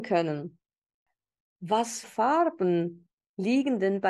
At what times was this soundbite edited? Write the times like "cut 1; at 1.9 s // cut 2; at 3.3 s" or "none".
cut 1; at 2.0 s